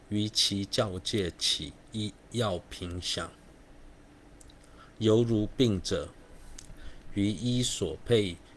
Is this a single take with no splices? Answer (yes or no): no